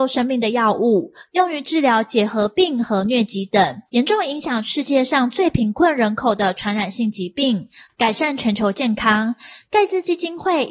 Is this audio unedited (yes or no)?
no